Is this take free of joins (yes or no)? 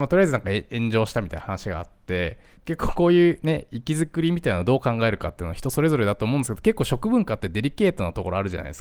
yes